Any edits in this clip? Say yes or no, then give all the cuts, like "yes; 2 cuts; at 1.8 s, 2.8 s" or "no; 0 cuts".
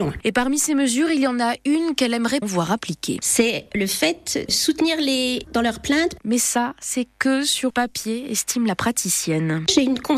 yes; 4 cuts; at 2.4 s, 4.5 s, 5.5 s, 7.7 s